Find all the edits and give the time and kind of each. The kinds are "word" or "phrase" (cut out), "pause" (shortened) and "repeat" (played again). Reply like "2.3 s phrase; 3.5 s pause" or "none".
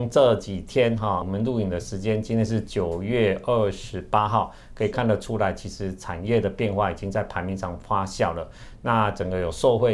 1.2 s word